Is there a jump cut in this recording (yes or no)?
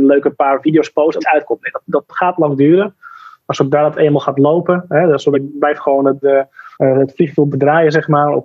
yes